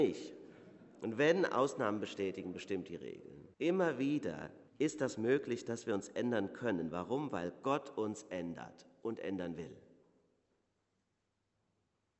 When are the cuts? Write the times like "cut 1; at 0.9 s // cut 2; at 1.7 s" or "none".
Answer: cut 1; at 3.5 s // cut 2; at 4.7 s